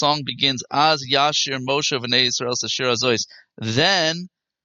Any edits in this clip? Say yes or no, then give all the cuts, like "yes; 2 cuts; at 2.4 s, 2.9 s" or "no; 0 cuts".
no; 0 cuts